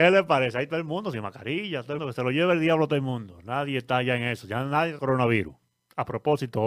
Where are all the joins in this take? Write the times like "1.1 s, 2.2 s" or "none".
2.0 s, 5.0 s